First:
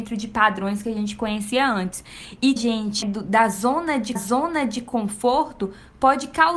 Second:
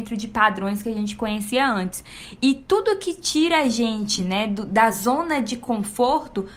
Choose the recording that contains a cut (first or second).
first